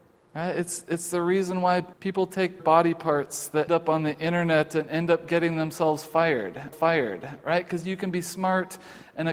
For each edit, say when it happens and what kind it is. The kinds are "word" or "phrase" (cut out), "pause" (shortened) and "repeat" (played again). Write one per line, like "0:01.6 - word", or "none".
0:01.9 - pause
0:02.6 - phrase
0:03.7 - word
0:06.7 - repeat